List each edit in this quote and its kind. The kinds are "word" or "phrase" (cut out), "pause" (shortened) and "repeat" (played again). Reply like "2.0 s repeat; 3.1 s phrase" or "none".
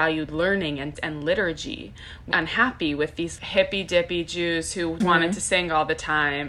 1.0 s word; 2.3 s word; 3.4 s word; 5.0 s word